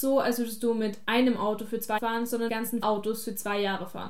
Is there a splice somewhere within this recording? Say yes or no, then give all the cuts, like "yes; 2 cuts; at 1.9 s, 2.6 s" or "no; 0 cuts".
yes; 3 cuts; at 2.0 s, 2.5 s, 2.8 s